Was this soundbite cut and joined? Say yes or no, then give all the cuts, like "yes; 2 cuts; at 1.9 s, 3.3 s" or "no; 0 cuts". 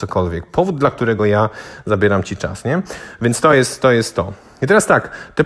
no; 0 cuts